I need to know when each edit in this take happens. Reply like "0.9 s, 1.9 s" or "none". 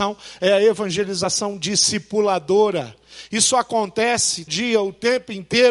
4.5 s